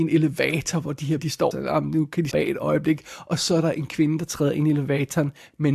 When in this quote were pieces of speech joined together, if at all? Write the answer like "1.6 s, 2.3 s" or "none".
1.2 s, 1.5 s, 2.3 s